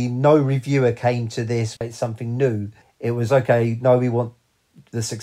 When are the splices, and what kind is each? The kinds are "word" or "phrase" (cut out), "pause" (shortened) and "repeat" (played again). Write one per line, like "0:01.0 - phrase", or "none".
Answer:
0:01.8 - word
0:02.8 - pause